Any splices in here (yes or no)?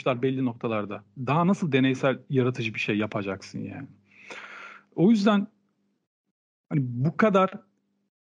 no